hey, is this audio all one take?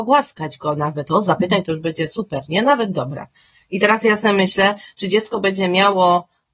yes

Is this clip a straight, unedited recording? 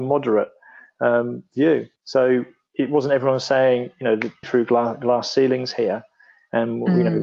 no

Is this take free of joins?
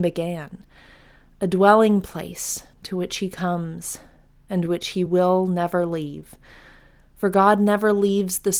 yes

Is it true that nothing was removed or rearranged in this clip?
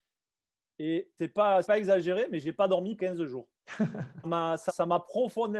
no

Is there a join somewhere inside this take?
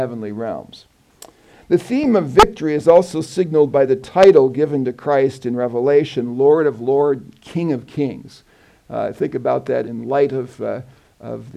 yes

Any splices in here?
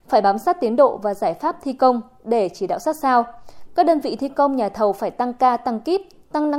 no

